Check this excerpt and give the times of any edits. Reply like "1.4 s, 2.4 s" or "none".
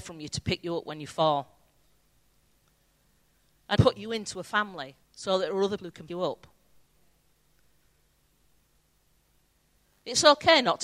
3.8 s, 5.0 s, 5.8 s, 6.1 s